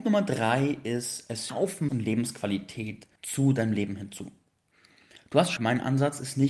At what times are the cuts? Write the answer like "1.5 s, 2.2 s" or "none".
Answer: 1.5 s, 1.9 s, 3.2 s, 5.6 s